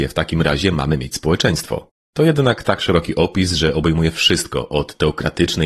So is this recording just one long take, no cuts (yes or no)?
yes